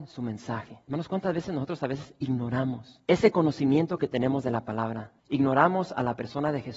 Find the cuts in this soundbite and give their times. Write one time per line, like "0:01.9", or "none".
0:05.2